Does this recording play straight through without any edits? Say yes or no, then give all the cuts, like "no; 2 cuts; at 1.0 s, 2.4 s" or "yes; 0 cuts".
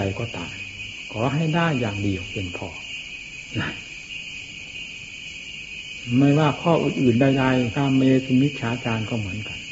no; 1 cut; at 7.7 s